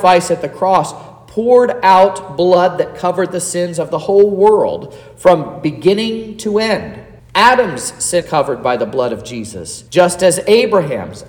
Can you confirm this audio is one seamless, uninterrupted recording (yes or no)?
no